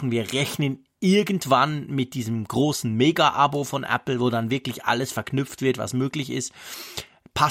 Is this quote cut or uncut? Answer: uncut